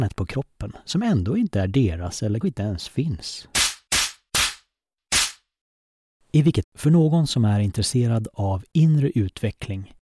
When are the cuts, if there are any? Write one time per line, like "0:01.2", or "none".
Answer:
0:02.4
0:06.6